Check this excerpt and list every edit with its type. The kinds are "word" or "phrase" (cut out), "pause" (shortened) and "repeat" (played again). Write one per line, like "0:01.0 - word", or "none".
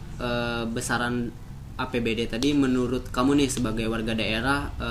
none